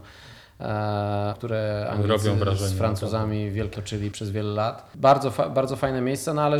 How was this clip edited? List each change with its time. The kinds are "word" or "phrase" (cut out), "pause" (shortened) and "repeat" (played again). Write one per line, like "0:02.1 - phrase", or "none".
0:01.3 - word
0:03.7 - word
0:04.1 - word